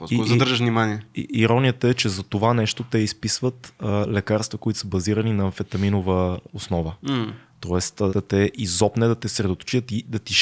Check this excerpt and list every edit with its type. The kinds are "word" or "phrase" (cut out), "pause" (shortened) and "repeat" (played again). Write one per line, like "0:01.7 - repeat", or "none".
0:08.1 - word